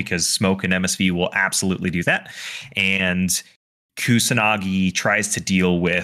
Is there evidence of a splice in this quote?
no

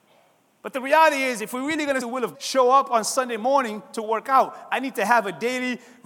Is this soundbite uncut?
no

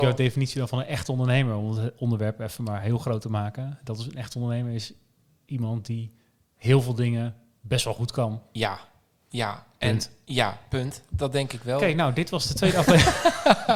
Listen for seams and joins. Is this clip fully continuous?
yes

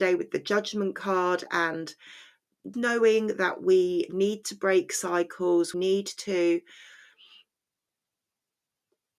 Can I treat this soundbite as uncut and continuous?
no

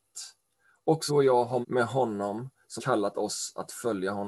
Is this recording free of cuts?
no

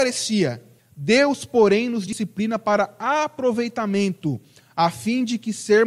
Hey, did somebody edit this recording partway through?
no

